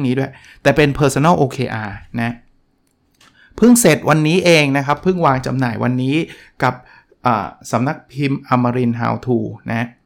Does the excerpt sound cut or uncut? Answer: uncut